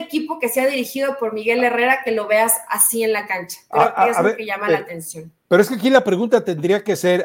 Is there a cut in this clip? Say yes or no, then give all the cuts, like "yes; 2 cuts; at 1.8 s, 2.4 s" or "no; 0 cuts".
yes; 1 cut; at 5.4 s